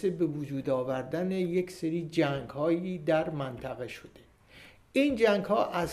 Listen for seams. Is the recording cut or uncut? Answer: uncut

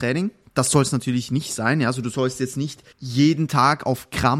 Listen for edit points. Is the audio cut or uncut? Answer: cut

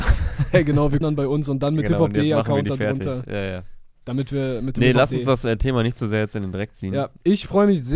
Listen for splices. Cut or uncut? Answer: cut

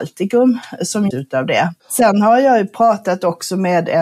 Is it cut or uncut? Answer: cut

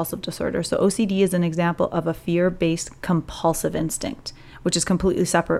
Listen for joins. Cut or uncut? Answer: uncut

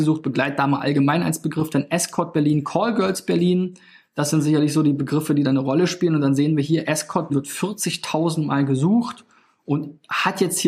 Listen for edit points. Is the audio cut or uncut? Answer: cut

